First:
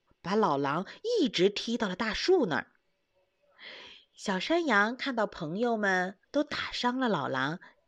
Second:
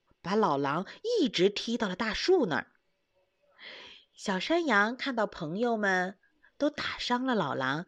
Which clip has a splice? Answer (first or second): first